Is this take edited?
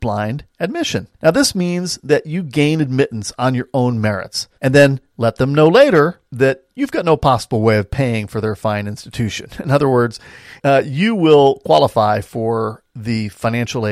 yes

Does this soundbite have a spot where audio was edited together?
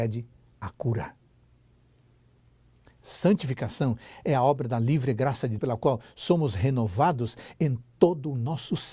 yes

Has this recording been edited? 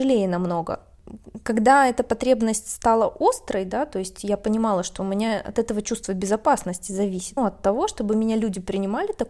yes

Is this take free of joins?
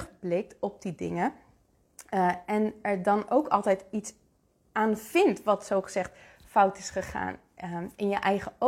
yes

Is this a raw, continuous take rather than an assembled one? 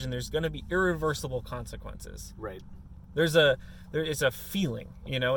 yes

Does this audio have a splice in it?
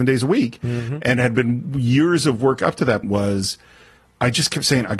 yes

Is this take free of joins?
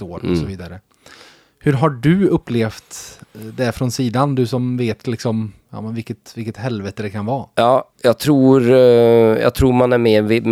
no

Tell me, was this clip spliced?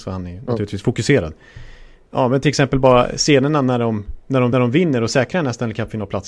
yes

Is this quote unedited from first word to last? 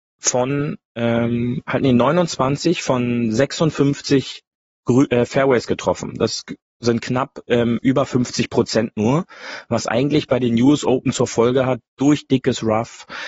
yes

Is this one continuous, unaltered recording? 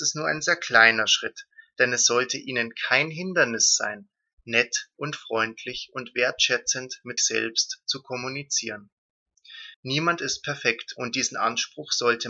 no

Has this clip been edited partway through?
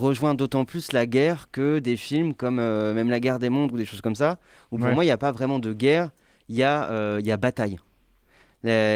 no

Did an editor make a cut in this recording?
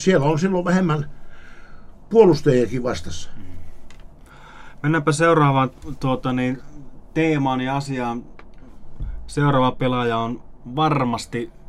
no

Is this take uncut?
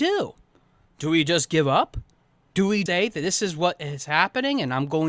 no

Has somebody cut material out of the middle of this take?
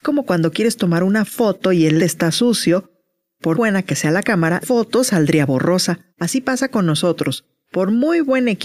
yes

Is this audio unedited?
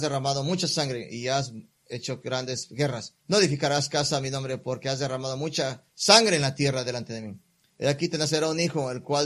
no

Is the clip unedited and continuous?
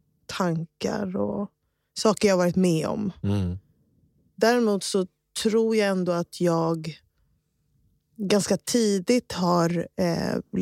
yes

